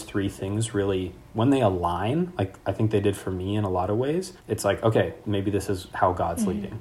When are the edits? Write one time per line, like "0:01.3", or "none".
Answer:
0:04.4
0:05.2

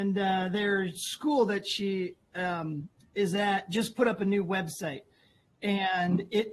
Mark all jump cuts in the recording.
none

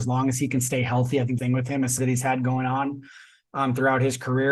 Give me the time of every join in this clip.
0:01.4
0:02.0

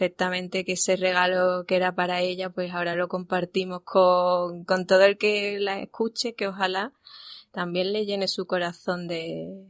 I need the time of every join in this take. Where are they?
none

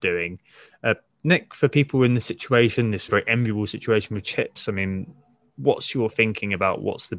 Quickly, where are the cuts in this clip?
0:03.1

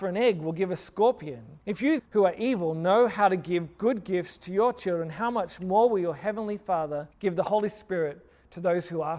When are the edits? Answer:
0:01.6
0:02.0
0:07.1

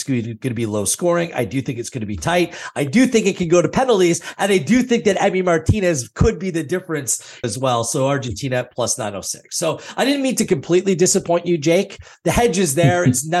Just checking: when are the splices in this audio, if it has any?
0:07.4

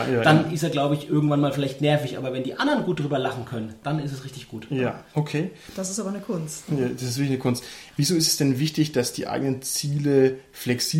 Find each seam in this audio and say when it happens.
none

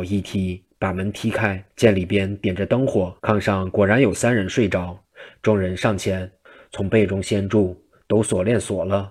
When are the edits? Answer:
0:01.7
0:03.2

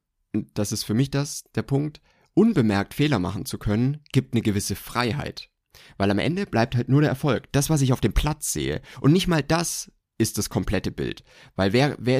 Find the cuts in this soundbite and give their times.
none

